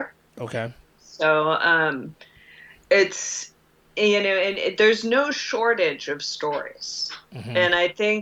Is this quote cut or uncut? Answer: cut